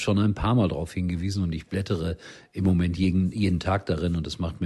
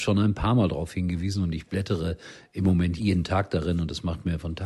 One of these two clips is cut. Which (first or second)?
second